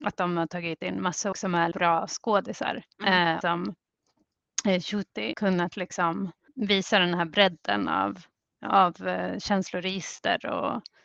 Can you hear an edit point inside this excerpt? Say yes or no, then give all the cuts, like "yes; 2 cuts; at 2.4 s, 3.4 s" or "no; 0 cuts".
yes; 6 cuts; at 1.3 s, 1.7 s, 2.9 s, 3.4 s, 5.3 s, 6.5 s